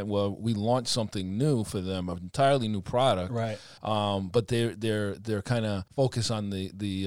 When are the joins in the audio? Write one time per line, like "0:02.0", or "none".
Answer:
0:03.8
0:05.9